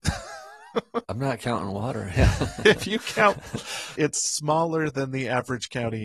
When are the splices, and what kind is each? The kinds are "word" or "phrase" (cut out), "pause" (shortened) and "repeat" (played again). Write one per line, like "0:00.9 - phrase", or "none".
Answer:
0:04.0 - word